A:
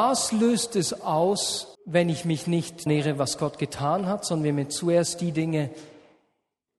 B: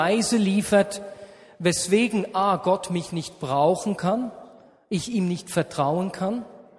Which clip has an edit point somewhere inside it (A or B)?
A